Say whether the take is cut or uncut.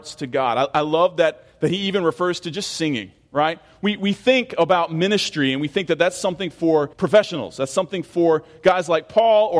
cut